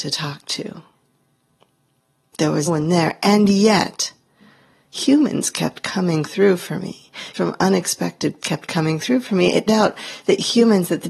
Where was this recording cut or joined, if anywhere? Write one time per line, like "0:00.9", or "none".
0:02.7
0:07.3
0:08.4
0:09.7